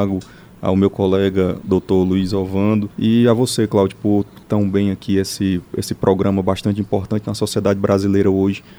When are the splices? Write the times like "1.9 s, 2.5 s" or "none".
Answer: 2.9 s, 4.4 s